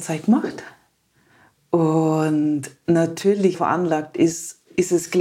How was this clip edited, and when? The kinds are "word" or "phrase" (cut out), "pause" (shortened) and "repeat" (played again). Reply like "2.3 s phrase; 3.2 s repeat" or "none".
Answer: 3.5 s phrase